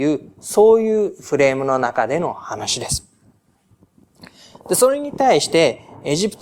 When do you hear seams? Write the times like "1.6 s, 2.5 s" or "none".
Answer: none